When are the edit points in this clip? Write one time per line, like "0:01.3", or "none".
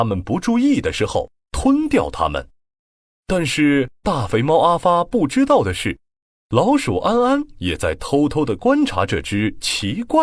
none